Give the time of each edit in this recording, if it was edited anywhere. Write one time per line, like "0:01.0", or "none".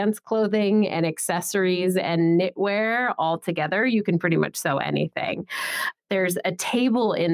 none